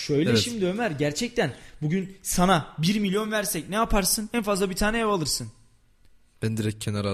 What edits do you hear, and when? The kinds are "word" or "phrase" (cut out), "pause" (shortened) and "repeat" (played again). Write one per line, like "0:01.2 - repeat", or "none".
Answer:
none